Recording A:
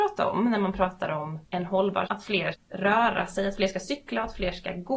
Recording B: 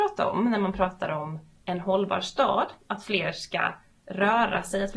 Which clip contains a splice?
A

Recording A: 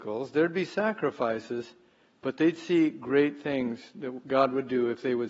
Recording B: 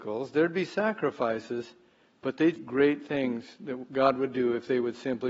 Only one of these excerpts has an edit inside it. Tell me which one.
B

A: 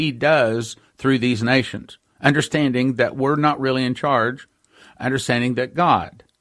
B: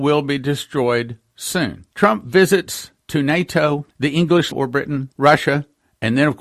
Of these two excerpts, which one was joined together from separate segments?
B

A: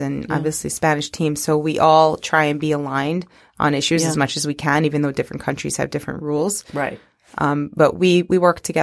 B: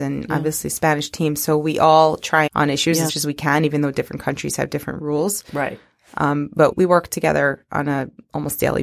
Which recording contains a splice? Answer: B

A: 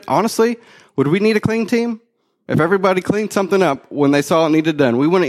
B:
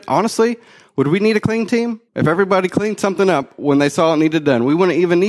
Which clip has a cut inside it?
B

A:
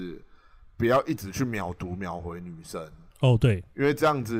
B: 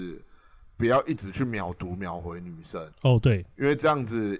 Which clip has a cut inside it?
B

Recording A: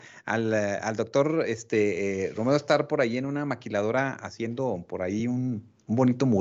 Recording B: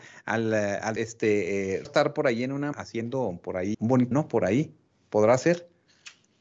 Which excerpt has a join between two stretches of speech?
B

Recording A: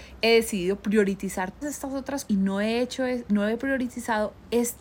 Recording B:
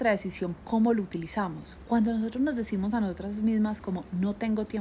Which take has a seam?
A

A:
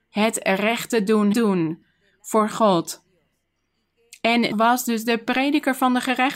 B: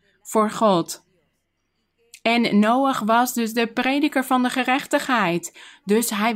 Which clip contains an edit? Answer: A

